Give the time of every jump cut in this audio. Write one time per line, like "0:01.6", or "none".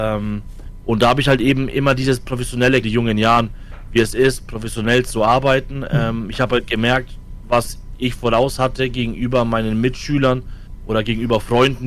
0:02.8